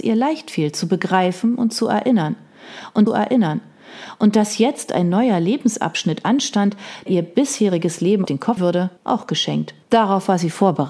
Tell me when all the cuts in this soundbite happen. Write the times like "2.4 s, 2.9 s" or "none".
3.1 s, 7.1 s, 8.2 s, 8.6 s, 9.0 s, 9.8 s